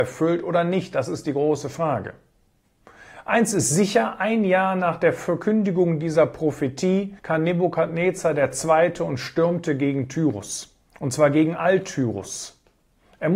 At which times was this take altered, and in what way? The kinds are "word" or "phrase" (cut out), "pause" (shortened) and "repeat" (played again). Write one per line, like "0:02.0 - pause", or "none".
0:07.2 - pause
0:10.9 - pause